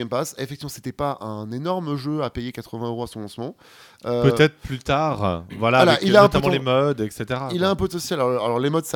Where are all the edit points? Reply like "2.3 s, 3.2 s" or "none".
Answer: none